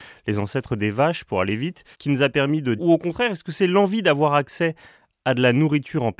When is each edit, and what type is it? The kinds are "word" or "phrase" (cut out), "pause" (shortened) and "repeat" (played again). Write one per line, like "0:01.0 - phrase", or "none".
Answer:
0:01.9 - pause
0:02.8 - phrase